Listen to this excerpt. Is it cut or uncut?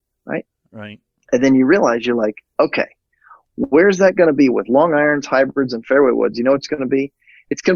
uncut